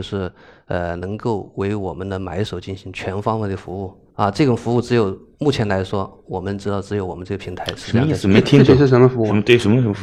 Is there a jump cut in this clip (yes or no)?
yes